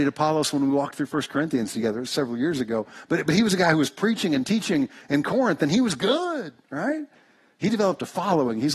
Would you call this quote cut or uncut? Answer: uncut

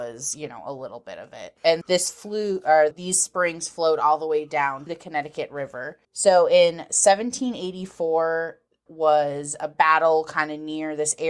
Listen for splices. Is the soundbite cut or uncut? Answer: cut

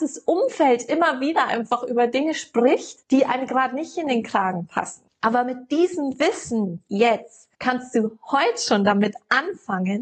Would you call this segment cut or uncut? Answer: cut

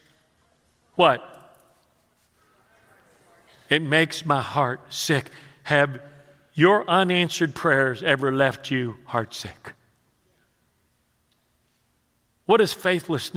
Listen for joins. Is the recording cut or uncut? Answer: uncut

